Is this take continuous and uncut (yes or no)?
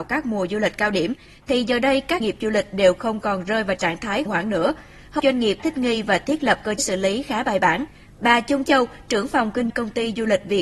no